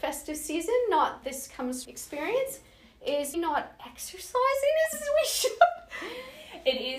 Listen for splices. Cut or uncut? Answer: cut